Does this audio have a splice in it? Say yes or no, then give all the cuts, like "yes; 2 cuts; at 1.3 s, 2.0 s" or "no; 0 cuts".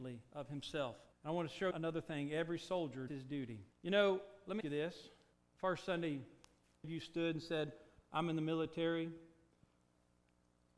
yes; 7 cuts; at 1.1 s, 1.7 s, 3.1 s, 3.7 s, 4.6 s, 5.3 s, 6.8 s